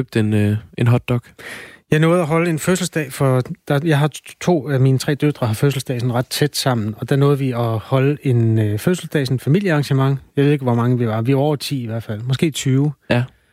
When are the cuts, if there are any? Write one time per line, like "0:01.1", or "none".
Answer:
none